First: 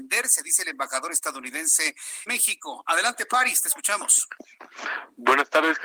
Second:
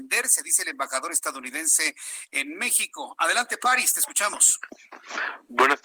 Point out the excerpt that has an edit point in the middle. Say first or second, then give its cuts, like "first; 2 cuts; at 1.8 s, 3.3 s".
first; 1 cut; at 2.3 s